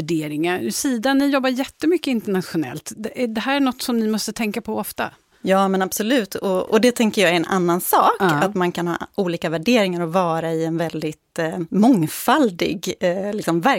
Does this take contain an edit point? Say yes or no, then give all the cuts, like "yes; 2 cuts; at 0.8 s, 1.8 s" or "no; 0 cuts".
no; 0 cuts